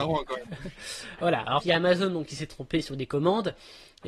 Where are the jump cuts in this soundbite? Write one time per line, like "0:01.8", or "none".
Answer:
0:01.6